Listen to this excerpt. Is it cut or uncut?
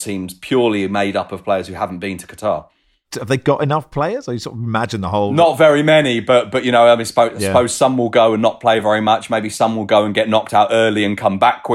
uncut